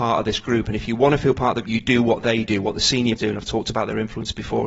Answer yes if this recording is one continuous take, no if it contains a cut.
no